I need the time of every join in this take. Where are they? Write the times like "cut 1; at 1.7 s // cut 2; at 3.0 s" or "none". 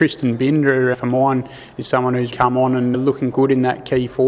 cut 1; at 0.9 s // cut 2; at 2.3 s // cut 3; at 2.9 s // cut 4; at 3.3 s